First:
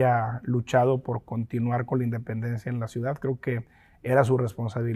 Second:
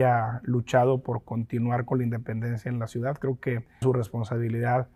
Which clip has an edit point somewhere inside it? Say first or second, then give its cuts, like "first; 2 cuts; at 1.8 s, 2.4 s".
second; 1 cut; at 3.8 s